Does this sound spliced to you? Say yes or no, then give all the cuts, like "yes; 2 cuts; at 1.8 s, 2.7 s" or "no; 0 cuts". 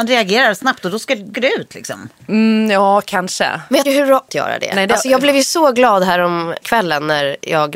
yes; 4 cuts; at 1.3 s, 3.8 s, 4.3 s, 6.6 s